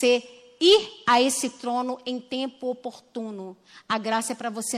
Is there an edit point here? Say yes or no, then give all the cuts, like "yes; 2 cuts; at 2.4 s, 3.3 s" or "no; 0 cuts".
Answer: no; 0 cuts